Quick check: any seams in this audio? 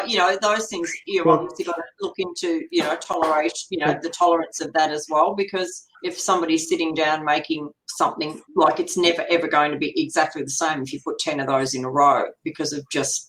yes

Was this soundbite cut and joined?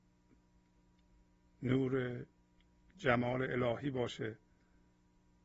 no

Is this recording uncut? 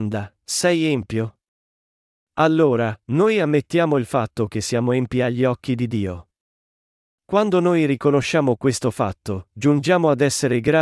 yes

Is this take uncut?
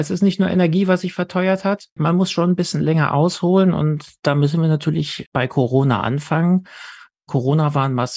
yes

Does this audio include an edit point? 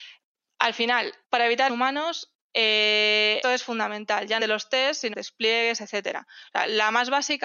yes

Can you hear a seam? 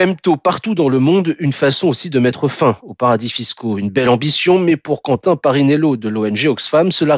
no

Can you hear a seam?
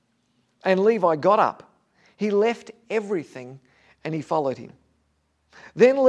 no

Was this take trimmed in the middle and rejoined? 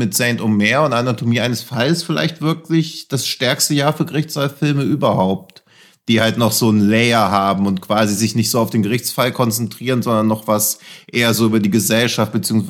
no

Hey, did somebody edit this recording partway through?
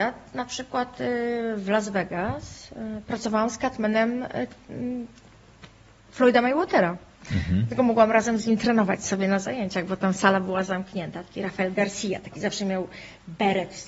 no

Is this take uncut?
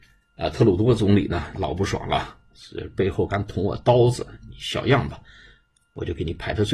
yes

